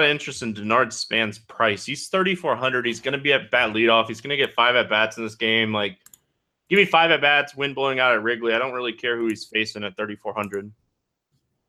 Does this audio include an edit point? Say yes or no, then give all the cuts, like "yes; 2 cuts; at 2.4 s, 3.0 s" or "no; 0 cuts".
no; 0 cuts